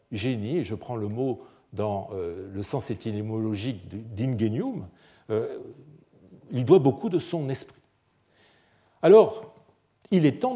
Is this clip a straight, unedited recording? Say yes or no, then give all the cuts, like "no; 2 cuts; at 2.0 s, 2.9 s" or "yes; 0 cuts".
yes; 0 cuts